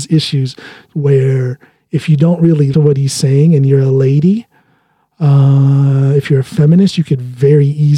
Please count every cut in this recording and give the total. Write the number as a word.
one